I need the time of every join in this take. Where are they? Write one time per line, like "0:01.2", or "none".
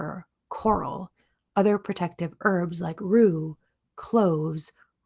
none